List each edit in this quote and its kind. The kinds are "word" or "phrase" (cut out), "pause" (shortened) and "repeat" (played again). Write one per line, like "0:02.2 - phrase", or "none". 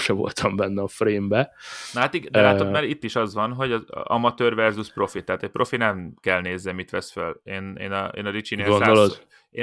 none